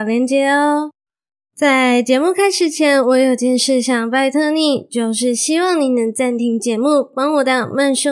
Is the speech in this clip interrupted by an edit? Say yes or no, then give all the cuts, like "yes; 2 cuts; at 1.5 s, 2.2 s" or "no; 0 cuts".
yes; 1 cut; at 1.1 s